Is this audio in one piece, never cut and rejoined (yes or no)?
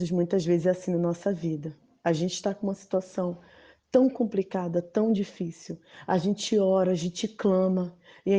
yes